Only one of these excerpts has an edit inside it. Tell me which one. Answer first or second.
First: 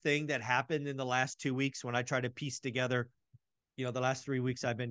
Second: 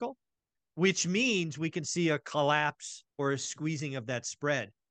second